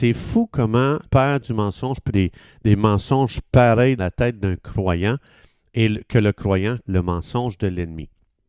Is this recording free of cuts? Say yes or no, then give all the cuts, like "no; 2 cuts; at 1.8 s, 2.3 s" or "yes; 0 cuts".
no; 4 cuts; at 1.0 s, 2.1 s, 4.0 s, 6.9 s